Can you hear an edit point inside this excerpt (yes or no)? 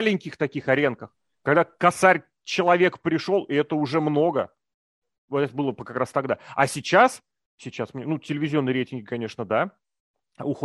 no